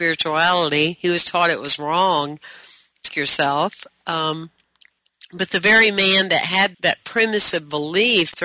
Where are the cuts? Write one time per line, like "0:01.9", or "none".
0:03.1
0:06.7